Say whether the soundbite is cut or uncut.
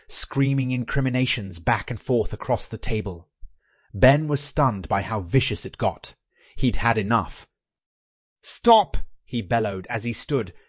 uncut